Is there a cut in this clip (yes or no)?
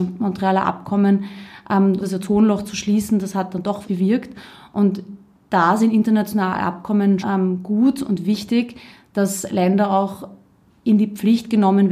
yes